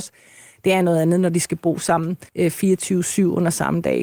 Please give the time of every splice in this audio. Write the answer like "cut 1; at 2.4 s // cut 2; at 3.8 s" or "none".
cut 1; at 2.3 s

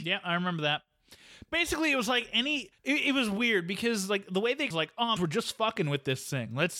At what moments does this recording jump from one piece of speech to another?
cut 1; at 2.8 s // cut 2; at 4.7 s // cut 3; at 5.2 s

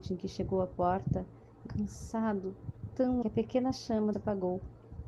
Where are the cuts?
cut 1; at 1.7 s // cut 2; at 3.2 s // cut 3; at 4.1 s

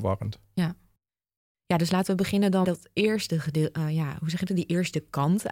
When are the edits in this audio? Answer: cut 1; at 2.6 s

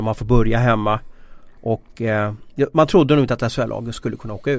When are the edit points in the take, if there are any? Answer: cut 1; at 1.6 s

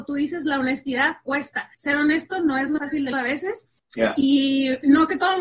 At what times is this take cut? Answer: cut 1; at 1.7 s // cut 2; at 2.8 s // cut 3; at 3.1 s // cut 4; at 3.8 s

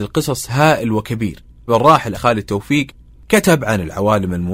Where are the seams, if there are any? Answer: cut 1; at 1.7 s // cut 2; at 2.1 s

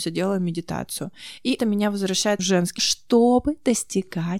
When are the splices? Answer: cut 1; at 1.6 s // cut 2; at 2.4 s // cut 3; at 2.8 s

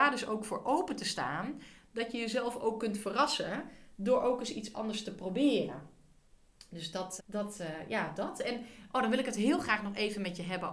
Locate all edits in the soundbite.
cut 1; at 7.2 s

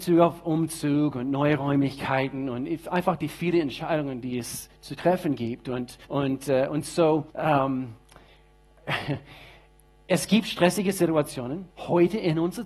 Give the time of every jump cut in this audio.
cut 1; at 6.0 s // cut 2; at 7.3 s // cut 3; at 11.7 s

